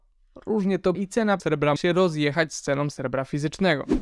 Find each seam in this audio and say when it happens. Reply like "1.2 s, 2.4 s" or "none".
0.9 s, 1.4 s, 1.8 s

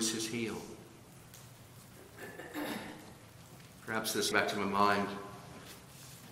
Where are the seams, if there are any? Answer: 4.3 s

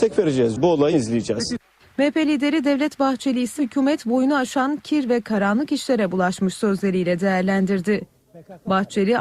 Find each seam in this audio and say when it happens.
0.9 s, 3.6 s

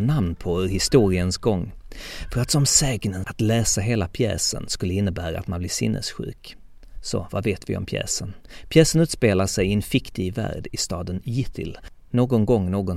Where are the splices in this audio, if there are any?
3.2 s

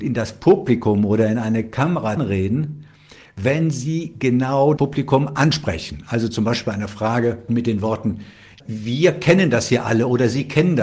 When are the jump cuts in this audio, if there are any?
2.2 s, 4.8 s, 7.5 s

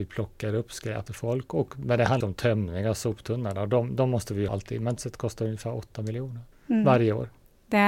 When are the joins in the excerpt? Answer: 1.1 s, 2.2 s, 4.5 s, 5.0 s, 6.5 s

